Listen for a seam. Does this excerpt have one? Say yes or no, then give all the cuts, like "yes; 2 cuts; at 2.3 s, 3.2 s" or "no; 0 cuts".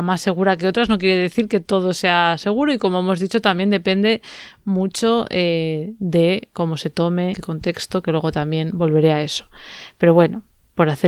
yes; 1 cut; at 7.3 s